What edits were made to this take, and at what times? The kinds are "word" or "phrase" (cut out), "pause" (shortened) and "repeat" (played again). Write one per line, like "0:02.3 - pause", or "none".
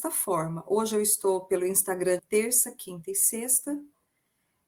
0:02.2 - word